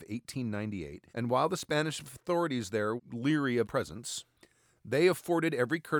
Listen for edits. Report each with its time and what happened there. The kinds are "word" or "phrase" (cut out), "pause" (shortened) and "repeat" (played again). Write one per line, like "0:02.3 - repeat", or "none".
0:01.1 - pause
0:03.0 - word
0:03.6 - word